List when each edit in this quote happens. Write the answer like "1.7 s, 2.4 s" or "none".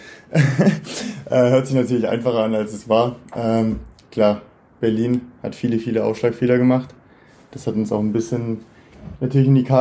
none